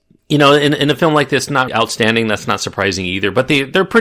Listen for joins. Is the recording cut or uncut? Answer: cut